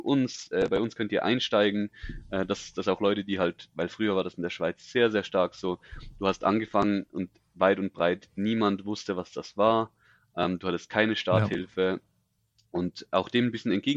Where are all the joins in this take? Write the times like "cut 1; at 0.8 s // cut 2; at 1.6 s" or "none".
none